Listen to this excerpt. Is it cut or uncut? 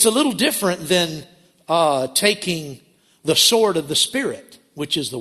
uncut